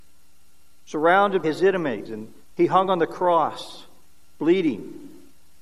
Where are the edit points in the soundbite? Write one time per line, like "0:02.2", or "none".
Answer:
0:01.4
0:02.1
0:02.5